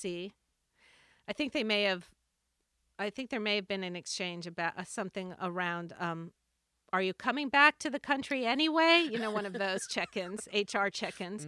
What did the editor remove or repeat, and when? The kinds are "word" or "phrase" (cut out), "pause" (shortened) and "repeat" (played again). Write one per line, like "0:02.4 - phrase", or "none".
none